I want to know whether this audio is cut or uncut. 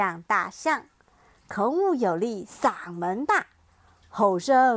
uncut